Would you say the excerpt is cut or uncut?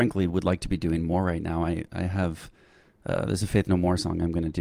uncut